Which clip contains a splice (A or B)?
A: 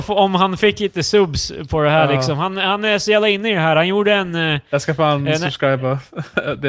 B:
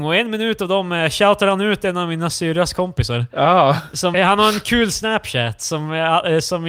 B